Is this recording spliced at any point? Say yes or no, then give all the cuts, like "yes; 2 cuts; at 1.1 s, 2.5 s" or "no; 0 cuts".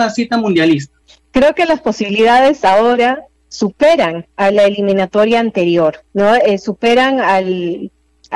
yes; 3 cuts; at 1.0 s, 4.3 s, 6.1 s